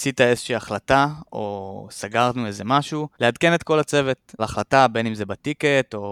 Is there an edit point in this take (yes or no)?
yes